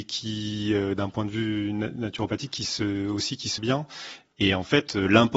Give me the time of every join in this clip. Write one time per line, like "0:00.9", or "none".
0:03.6